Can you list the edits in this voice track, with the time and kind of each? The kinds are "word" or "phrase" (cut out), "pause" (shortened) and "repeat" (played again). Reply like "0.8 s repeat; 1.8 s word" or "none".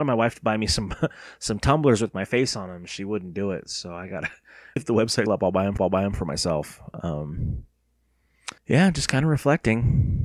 4.8 s word; 5.3 s word; 5.8 s repeat; 8.6 s pause